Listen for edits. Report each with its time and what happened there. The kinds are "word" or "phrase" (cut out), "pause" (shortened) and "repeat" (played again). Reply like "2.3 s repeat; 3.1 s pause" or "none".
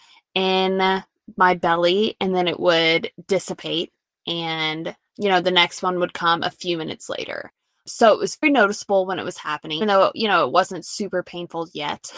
8.4 s word; 9.8 s word

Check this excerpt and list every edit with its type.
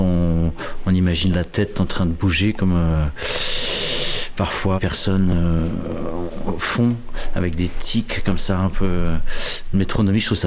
4.8 s phrase

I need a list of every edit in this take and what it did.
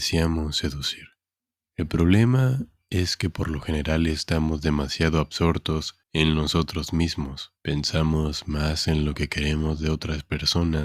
1.4 s pause; 6.0 s pause; 7.6 s pause

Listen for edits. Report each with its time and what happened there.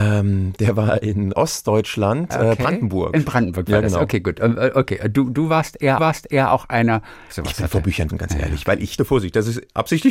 1.3 s word; 6.0 s repeat; 7.3 s phrase; 8.1 s word; 9.0 s word

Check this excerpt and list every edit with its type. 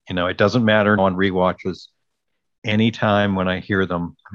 1.0 s word

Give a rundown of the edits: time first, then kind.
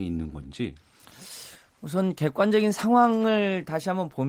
none

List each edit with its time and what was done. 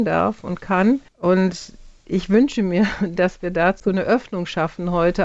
1.1 s pause

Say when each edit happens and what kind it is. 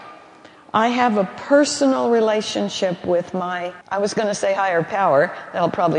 3.8 s pause

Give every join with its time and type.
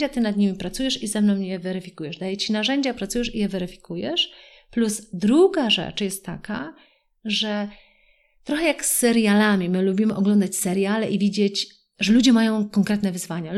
none

